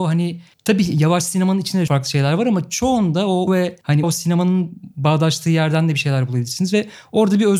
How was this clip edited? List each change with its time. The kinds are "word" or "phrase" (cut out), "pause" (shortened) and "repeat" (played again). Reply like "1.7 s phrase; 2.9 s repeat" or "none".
1.9 s word; 3.5 s word; 4.0 s word